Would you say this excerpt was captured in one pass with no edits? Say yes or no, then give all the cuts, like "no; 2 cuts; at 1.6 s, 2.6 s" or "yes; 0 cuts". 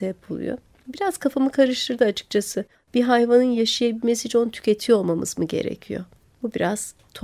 yes; 0 cuts